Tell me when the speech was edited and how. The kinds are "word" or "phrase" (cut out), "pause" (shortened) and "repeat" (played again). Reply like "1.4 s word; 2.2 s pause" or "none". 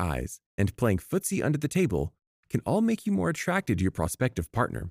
none